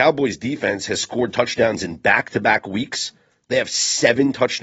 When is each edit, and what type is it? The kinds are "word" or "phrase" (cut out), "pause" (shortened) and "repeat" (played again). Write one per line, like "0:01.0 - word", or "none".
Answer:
none